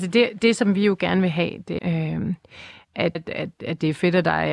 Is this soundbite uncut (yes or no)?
no